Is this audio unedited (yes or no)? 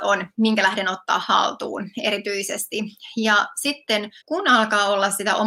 no